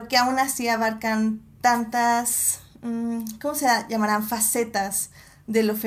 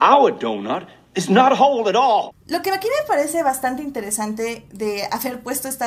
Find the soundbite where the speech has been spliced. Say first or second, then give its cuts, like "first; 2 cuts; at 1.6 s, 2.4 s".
second; 1 cut; at 1.0 s